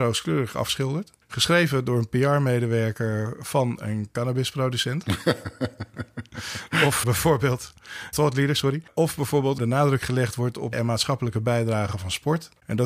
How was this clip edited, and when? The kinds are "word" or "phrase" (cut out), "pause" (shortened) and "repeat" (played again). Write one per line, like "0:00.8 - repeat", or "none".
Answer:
0:07.0 - word
0:08.1 - word
0:09.6 - phrase
0:10.7 - phrase